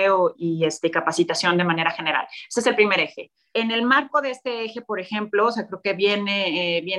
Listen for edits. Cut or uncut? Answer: uncut